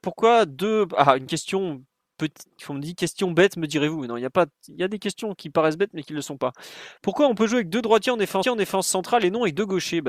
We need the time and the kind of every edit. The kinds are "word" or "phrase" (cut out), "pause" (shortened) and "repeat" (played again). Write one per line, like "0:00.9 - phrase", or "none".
0:08.4 - repeat